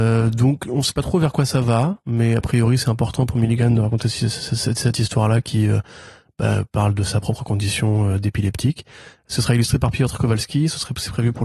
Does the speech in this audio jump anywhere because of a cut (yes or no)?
no